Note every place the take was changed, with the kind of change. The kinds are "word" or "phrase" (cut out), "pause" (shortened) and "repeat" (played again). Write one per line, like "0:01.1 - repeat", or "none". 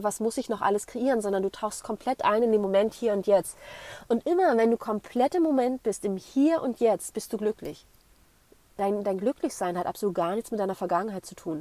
none